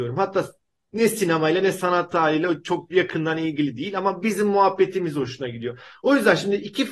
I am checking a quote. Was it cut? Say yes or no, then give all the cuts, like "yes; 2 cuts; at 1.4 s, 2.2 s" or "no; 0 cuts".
no; 0 cuts